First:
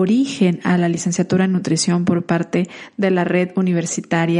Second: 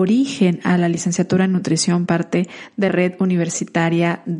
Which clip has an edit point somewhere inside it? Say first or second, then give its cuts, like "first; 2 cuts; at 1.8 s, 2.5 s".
second; 2 cuts; at 2.1 s, 2.9 s